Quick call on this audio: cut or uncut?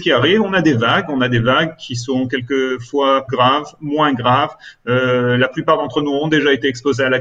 cut